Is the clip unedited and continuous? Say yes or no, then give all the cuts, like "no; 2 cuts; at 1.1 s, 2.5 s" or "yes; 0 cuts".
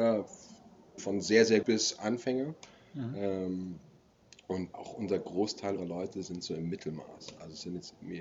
no; 4 cuts; at 1.0 s, 1.6 s, 4.7 s, 5.8 s